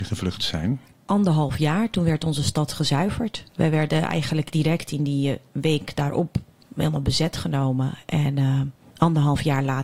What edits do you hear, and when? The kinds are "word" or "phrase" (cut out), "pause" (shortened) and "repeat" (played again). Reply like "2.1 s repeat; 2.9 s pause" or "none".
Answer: 3.5 s pause